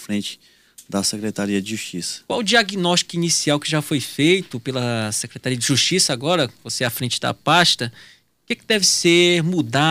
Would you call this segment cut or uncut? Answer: uncut